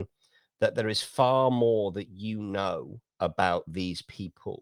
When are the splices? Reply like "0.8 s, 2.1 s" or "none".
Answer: none